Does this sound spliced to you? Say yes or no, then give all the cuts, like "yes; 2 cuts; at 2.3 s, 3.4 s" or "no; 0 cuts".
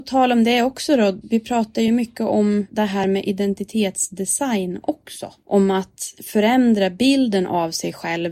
no; 0 cuts